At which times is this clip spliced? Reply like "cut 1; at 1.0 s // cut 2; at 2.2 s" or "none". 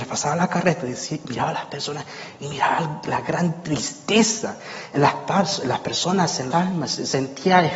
cut 1; at 6.5 s